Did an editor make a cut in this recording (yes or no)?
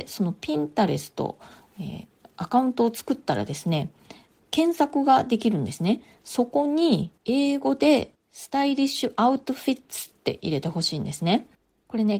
yes